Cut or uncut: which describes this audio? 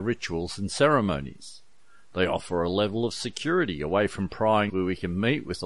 cut